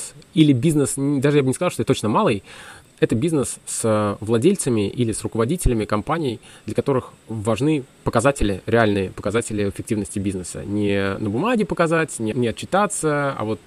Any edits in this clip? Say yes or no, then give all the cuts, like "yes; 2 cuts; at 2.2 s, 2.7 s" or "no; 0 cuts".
yes; 3 cuts; at 1.8 s, 7.2 s, 12.3 s